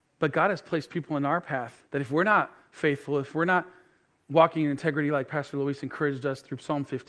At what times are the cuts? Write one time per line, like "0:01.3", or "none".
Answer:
0:01.8